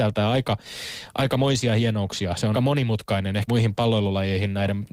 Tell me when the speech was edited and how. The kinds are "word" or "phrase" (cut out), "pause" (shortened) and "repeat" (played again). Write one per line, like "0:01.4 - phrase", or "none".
0:02.5 - word
0:03.5 - word